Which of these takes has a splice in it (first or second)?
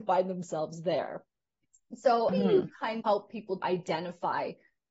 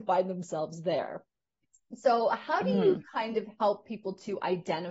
first